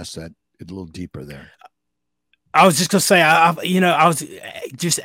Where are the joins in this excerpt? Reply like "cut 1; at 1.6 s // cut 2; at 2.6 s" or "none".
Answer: none